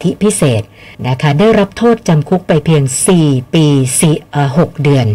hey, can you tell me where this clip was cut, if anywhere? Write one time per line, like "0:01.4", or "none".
0:00.9